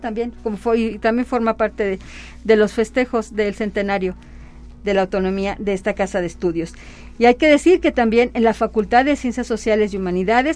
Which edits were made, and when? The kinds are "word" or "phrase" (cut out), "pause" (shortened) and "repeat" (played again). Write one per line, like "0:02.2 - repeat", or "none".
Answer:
none